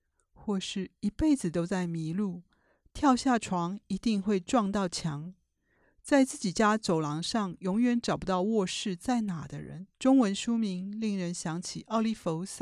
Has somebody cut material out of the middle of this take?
yes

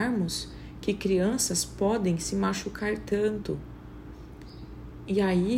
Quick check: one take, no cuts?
yes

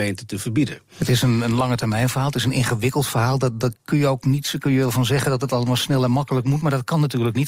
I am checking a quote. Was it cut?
yes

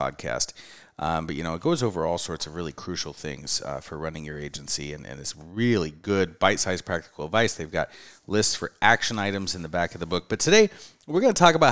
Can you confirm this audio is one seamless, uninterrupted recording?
yes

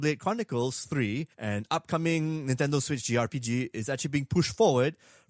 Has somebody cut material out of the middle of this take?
yes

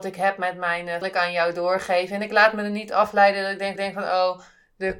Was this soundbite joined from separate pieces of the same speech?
yes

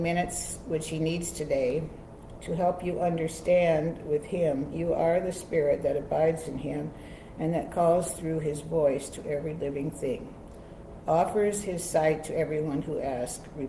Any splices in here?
no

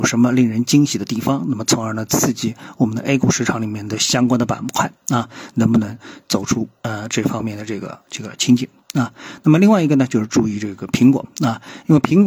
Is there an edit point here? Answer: no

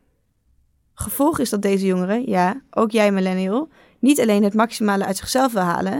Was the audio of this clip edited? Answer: no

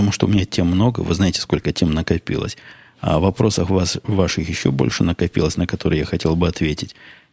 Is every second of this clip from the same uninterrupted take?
yes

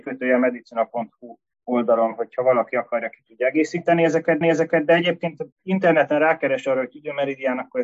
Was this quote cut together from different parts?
yes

